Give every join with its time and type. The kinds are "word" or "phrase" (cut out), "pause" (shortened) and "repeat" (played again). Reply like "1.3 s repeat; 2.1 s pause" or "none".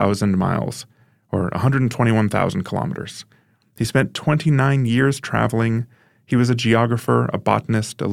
none